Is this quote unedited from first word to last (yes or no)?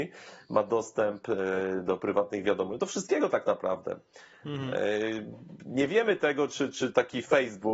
yes